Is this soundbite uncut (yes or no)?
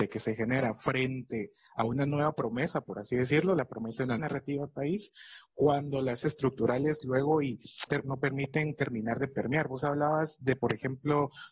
no